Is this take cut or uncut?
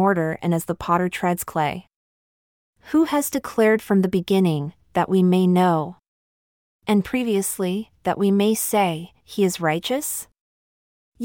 uncut